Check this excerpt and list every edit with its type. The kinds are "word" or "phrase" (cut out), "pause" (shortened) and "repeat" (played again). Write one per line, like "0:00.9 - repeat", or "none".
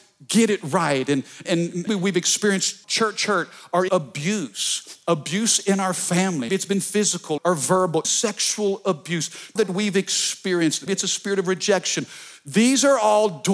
0:01.4 - word
0:01.9 - word
0:02.8 - word
0:03.9 - word
0:06.5 - word
0:07.4 - word
0:08.0 - word
0:09.6 - word
0:10.9 - word